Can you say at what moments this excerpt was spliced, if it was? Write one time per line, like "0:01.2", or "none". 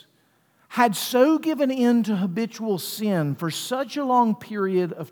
none

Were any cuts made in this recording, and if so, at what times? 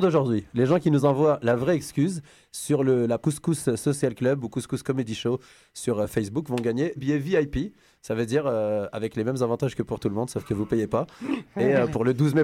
0:03.2
0:07.0

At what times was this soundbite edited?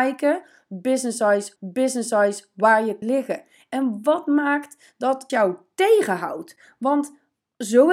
0:01.6
0:03.0
0:05.3

